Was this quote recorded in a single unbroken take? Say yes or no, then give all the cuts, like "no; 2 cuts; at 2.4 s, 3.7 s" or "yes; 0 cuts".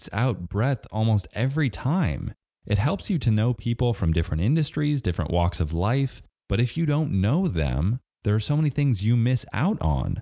yes; 0 cuts